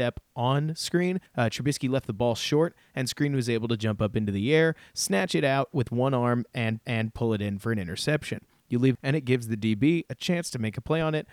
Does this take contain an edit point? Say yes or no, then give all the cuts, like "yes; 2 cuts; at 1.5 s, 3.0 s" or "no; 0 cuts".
yes; 3 cuts; at 1.3 s, 6.8 s, 8.9 s